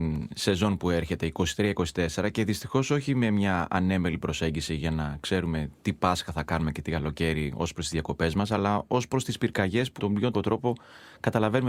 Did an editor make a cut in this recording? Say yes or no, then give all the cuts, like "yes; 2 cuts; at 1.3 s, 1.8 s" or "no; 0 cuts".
yes; 2 cuts; at 10.0 s, 10.3 s